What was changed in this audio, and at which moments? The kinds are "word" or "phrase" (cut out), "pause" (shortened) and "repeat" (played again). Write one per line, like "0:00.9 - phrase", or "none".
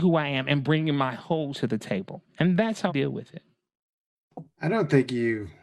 0:01.5 - word
0:02.3 - pause
0:02.9 - word
0:04.5 - pause